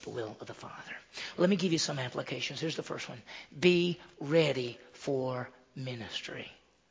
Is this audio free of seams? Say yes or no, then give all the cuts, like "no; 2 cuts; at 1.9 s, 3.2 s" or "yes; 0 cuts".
yes; 0 cuts